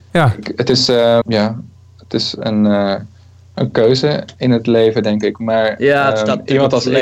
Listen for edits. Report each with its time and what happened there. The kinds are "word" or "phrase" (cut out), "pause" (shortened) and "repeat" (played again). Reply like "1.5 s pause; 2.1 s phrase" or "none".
1.2 s word